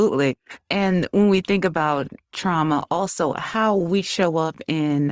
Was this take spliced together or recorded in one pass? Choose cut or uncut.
uncut